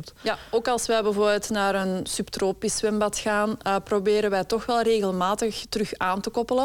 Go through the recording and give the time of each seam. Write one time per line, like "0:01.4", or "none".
none